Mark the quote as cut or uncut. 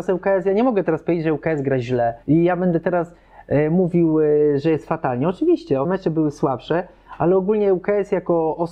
cut